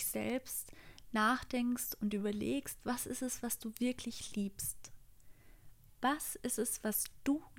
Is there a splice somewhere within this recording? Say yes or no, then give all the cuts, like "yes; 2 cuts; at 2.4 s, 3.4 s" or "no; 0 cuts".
no; 0 cuts